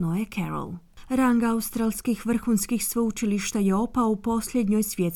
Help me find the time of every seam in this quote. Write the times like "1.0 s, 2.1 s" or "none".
none